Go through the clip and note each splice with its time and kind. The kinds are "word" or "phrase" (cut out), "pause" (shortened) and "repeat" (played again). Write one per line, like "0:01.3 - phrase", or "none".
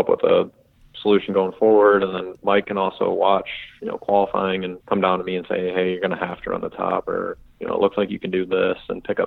0:04.8 - pause